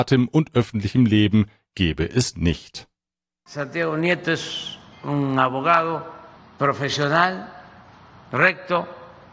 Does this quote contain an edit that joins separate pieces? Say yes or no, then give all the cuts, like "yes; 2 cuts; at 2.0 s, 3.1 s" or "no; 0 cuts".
no; 0 cuts